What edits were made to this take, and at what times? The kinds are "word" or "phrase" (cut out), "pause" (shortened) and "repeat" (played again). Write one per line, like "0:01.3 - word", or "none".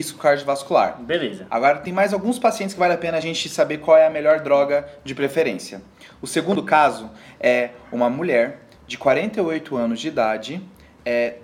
none